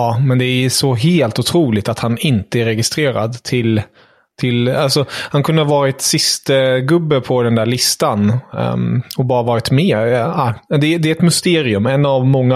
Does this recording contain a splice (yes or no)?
no